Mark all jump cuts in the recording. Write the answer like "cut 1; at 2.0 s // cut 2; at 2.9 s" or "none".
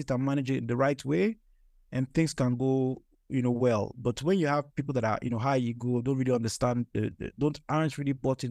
none